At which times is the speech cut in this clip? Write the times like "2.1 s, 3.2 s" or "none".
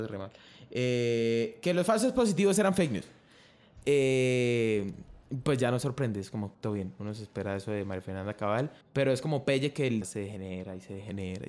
6.5 s, 8.8 s, 10.0 s